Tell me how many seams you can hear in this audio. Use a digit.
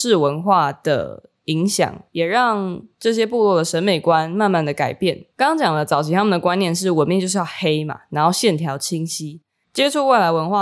0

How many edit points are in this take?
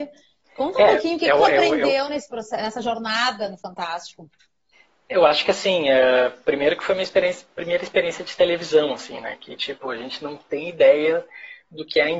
1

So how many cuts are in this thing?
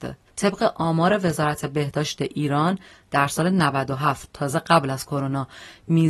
0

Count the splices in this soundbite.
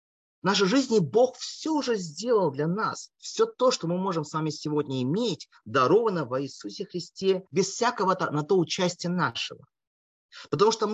1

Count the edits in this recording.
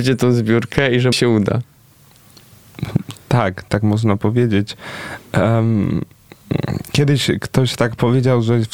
2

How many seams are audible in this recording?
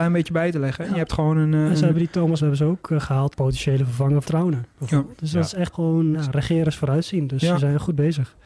5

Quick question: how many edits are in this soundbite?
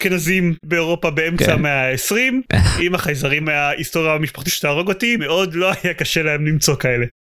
3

